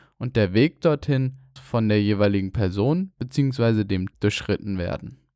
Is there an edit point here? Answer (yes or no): yes